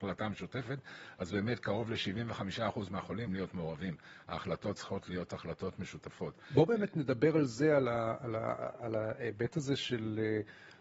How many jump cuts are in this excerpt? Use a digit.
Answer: 1